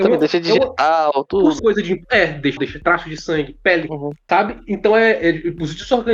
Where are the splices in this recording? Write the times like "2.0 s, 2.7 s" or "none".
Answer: 1.6 s, 2.6 s, 3.9 s